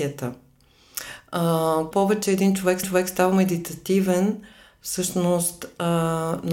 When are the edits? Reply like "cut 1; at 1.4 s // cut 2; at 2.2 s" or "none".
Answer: cut 1; at 1.9 s // cut 2; at 2.8 s